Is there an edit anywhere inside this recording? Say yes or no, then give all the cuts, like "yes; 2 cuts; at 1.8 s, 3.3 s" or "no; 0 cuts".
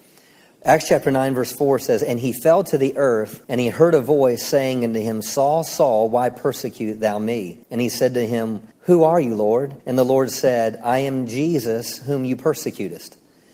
yes; 4 cuts; at 3.4 s, 7.6 s, 8.7 s, 9.8 s